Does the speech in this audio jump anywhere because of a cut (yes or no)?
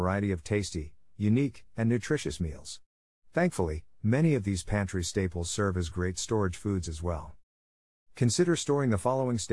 no